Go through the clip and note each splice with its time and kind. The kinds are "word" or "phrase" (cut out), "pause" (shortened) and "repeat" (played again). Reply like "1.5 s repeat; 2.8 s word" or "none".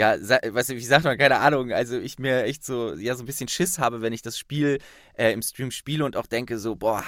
none